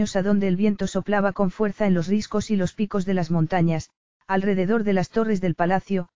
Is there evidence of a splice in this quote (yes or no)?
no